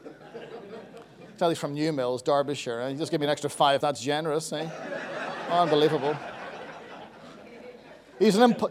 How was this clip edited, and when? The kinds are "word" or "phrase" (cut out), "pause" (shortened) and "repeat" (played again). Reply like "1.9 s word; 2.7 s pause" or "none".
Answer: 3.8 s phrase